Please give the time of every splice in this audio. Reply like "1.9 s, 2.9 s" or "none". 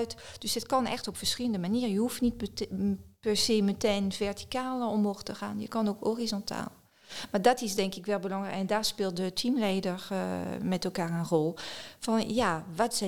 none